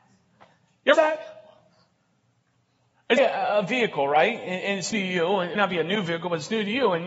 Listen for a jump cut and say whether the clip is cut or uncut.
cut